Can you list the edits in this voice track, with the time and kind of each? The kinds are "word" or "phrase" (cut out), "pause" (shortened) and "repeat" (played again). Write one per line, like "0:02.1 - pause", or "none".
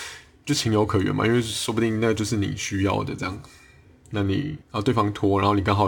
0:04.6 - pause